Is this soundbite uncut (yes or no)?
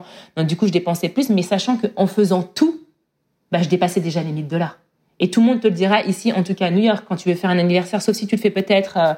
yes